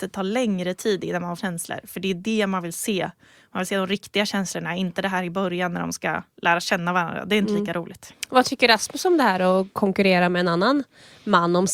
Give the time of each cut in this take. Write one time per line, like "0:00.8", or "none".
0:01.4
0:06.3